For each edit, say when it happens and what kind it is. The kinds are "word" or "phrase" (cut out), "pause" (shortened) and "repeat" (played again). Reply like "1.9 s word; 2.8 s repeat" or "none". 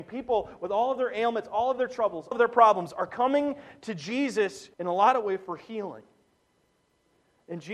2.3 s word; 4.7 s pause